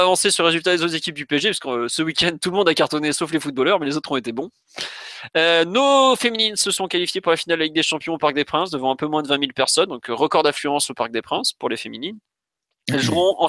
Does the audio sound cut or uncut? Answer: uncut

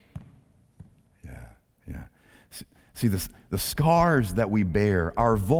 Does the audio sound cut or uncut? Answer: uncut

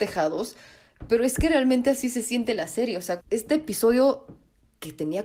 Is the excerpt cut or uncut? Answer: cut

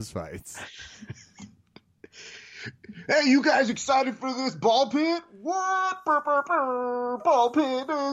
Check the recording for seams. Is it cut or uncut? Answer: uncut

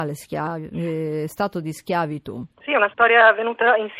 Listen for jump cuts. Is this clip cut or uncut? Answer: cut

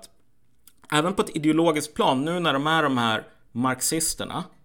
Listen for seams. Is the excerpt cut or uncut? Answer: uncut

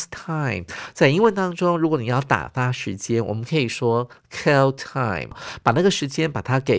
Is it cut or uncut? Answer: uncut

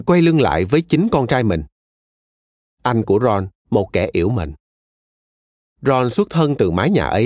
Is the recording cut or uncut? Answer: uncut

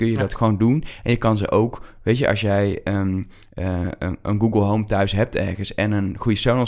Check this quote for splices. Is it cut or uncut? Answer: uncut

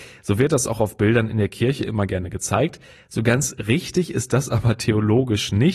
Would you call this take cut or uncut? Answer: uncut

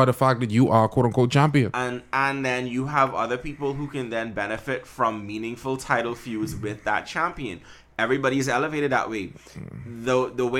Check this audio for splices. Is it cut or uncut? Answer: uncut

